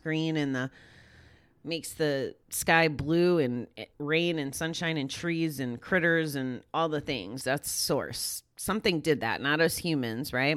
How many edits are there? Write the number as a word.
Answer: two